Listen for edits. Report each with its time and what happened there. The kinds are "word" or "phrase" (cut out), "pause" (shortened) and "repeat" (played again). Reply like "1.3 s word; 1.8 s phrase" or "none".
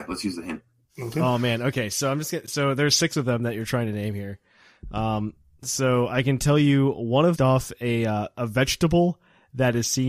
7.4 s phrase

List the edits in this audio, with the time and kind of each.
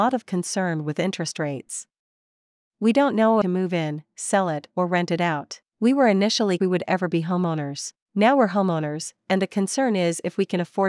3.4 s phrase; 5.7 s pause; 6.6 s phrase; 8.0 s pause

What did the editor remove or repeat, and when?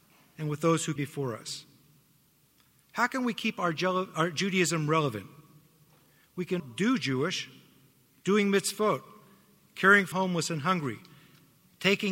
1.0 s word; 6.6 s word; 10.1 s word

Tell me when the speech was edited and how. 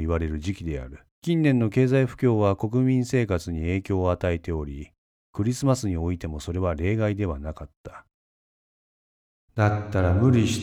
1.1 s pause

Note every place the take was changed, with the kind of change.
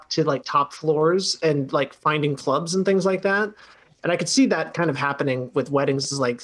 none

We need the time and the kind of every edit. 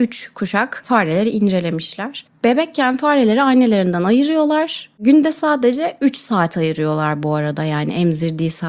none

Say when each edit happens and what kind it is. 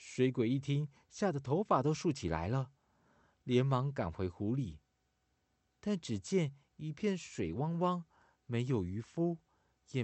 none

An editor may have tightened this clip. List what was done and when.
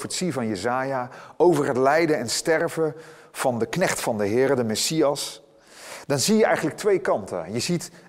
none

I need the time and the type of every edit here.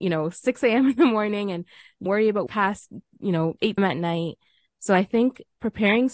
2.1 s word; 2.5 s word; 3.8 s word

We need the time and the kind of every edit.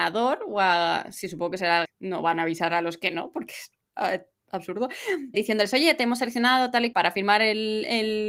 1.8 s word; 5.3 s word; 6.9 s word

